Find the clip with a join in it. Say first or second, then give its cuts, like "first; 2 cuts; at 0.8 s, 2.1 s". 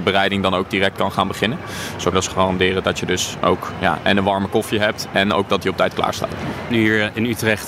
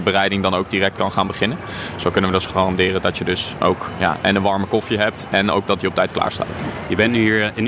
first; 2 cuts; at 2.1 s, 6.7 s